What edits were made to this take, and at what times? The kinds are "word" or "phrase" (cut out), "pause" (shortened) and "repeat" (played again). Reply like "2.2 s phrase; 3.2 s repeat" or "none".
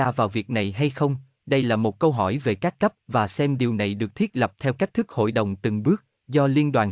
3.0 s pause